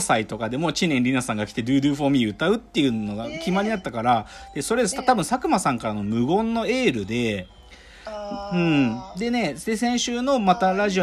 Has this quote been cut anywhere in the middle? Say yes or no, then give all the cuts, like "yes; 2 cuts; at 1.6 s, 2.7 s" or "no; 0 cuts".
no; 0 cuts